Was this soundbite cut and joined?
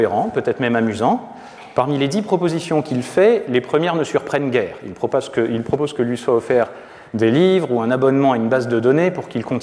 no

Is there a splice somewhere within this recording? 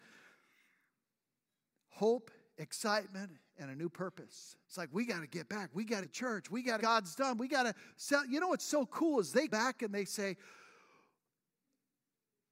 yes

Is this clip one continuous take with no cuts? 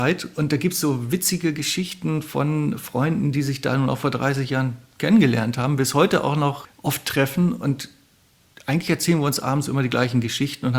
yes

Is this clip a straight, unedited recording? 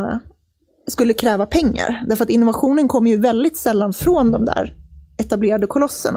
yes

